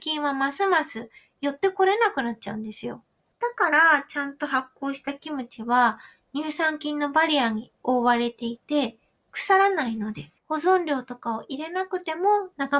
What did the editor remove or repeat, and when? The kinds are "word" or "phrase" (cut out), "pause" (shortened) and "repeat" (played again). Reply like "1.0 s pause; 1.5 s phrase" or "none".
10.4 s pause